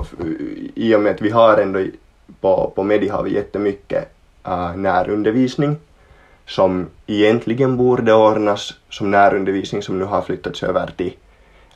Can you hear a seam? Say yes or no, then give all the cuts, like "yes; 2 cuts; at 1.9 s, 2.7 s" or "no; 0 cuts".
no; 0 cuts